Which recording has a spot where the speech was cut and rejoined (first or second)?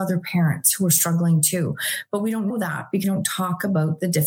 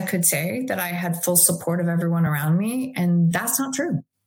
first